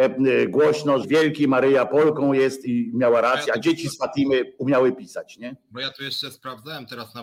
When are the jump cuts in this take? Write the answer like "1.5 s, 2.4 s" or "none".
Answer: 1.0 s, 2.6 s